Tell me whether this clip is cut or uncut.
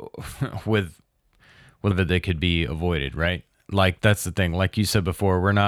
cut